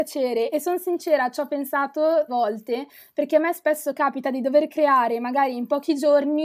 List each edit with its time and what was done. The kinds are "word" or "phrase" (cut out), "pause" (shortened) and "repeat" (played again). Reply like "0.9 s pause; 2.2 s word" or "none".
2.3 s word